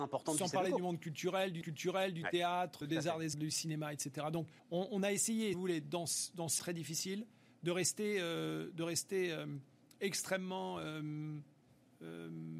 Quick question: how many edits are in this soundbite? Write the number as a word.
six